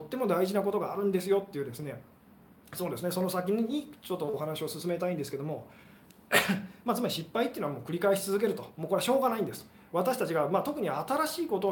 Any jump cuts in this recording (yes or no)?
no